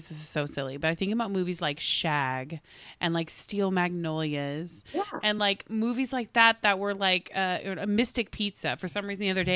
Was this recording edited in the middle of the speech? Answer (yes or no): no